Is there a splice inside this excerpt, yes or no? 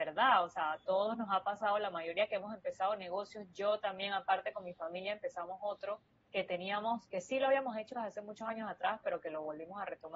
no